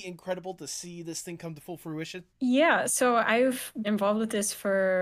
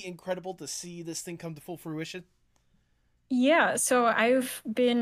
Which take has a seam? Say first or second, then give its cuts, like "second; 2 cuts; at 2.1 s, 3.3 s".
first; 2 cuts; at 2.3 s, 3.8 s